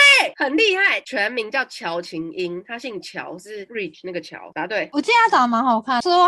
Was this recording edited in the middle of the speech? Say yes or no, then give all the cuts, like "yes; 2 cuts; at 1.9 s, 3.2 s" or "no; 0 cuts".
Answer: no; 0 cuts